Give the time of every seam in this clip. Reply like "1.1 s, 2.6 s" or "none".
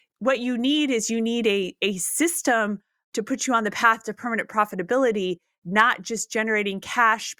none